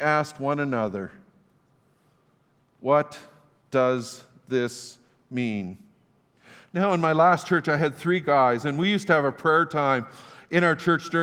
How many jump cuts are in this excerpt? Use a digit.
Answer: 0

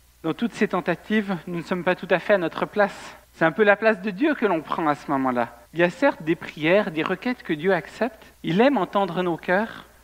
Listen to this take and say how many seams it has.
3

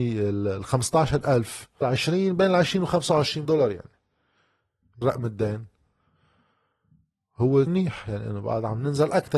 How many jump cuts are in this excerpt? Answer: 4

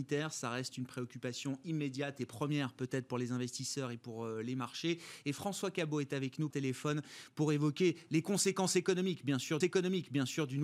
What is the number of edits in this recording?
2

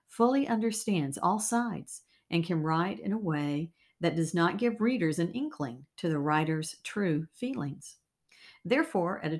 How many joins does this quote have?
0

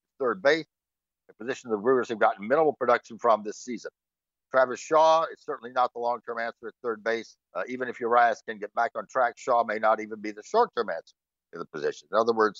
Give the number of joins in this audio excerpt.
1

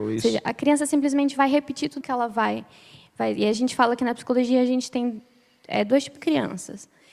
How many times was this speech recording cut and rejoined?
2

